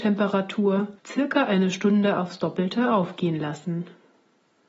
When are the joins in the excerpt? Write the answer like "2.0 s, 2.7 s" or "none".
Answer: 1.0 s